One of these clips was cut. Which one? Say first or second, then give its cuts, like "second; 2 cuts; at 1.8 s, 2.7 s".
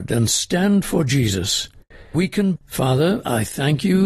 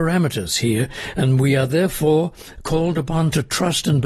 first; 2 cuts; at 2.1 s, 2.6 s